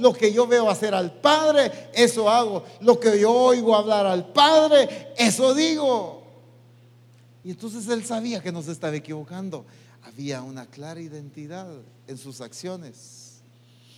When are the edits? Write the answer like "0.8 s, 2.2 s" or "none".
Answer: none